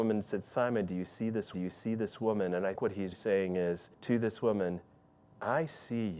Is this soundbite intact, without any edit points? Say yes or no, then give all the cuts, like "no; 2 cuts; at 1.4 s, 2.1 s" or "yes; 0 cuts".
no; 4 cuts; at 1.5 s, 2.8 s, 3.1 s, 3.9 s